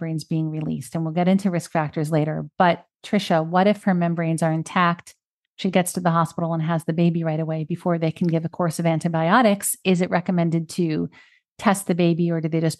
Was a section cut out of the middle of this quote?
no; 0 cuts

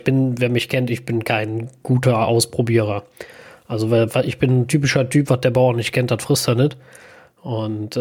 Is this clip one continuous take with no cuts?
yes; 0 cuts

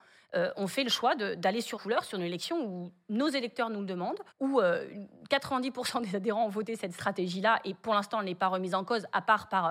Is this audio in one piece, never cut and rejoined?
no; 2 cuts; at 1.8 s, 4.3 s

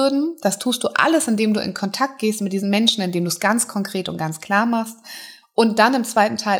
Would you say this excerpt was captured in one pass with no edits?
yes; 0 cuts

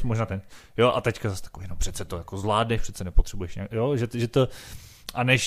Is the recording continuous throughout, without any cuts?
yes; 0 cuts

